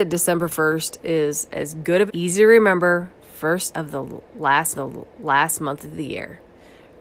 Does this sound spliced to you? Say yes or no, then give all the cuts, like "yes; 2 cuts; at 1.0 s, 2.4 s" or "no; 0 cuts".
yes; 3 cuts; at 2.1 s, 3.7 s, 4.7 s